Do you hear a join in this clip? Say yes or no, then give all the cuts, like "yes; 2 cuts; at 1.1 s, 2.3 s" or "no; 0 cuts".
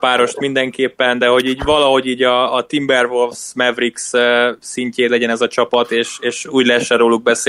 no; 0 cuts